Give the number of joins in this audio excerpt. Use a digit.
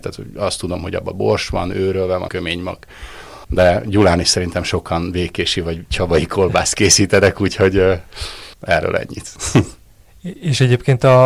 3